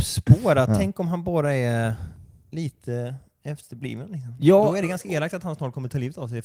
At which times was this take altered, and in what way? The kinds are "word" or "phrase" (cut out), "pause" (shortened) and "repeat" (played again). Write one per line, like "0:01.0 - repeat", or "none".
none